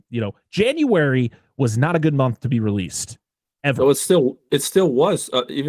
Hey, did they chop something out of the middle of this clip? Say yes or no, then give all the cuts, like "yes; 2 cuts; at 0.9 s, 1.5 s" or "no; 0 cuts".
no; 0 cuts